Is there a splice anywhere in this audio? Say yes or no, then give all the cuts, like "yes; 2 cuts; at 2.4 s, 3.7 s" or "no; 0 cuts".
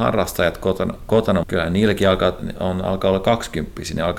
yes; 2 cuts; at 1.4 s, 2.4 s